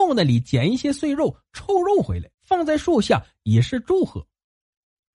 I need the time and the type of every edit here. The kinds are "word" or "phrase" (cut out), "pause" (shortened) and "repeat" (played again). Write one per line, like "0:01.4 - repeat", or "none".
0:02.3 - pause